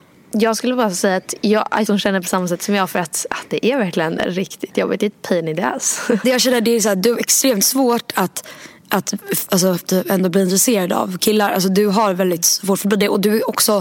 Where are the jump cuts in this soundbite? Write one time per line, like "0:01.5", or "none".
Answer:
0:01.9
0:06.2